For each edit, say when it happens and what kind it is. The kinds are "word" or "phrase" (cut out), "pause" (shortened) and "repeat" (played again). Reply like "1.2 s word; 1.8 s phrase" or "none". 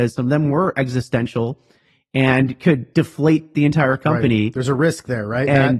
none